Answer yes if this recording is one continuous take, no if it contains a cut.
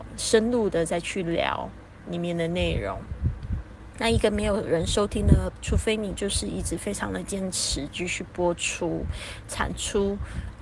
no